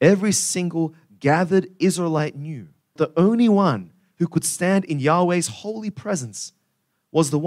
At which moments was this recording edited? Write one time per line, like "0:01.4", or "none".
0:03.0